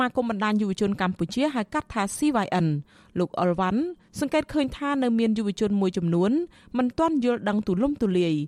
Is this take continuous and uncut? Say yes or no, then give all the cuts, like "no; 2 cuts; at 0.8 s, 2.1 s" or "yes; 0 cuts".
yes; 0 cuts